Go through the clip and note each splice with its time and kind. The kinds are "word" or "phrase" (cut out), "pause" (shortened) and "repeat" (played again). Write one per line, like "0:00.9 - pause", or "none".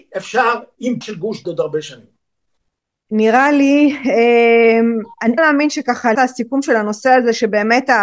0:01.0 - word
0:01.4 - phrase
0:02.8 - pause
0:05.4 - phrase
0:06.1 - word